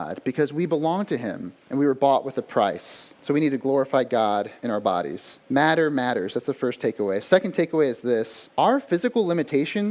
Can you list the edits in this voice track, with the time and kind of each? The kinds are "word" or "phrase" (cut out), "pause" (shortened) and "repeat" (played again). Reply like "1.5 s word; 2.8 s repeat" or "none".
1.6 s pause; 3.1 s pause; 4.6 s pause; 5.4 s pause; 8.5 s pause